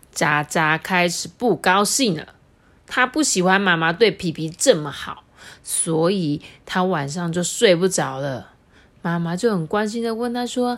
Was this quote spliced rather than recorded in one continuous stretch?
no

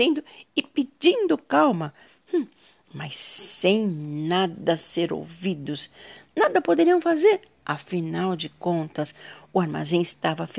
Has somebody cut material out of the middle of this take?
no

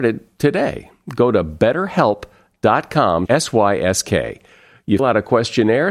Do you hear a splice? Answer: yes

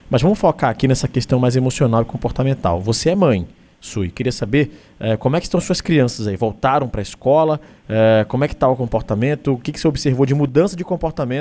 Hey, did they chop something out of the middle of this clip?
no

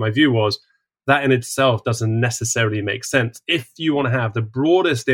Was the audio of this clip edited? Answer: no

